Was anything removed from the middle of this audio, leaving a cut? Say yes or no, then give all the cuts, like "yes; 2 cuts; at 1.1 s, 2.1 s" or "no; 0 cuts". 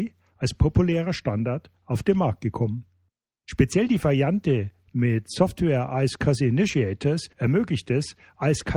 yes; 1 cut; at 7.3 s